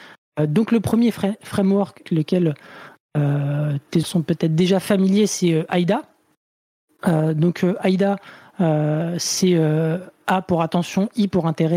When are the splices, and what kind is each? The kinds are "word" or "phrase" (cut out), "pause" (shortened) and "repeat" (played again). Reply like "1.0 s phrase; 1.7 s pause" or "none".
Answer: 2.0 s word; 4.0 s word